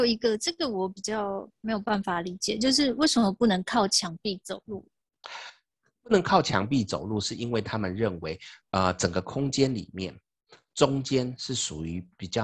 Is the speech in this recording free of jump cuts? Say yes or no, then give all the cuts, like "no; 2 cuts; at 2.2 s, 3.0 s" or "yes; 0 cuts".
yes; 0 cuts